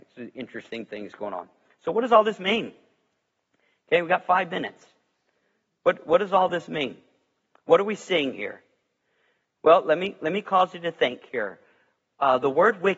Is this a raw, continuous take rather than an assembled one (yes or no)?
yes